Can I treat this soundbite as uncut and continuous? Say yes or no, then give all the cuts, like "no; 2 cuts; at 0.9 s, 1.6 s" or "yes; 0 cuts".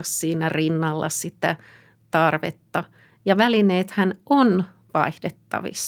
yes; 0 cuts